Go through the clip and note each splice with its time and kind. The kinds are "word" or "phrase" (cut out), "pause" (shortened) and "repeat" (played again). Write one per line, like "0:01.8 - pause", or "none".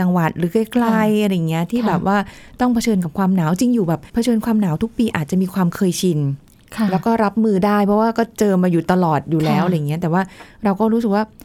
0:04.1 - pause